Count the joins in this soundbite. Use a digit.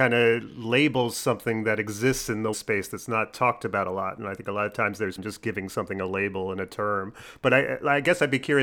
2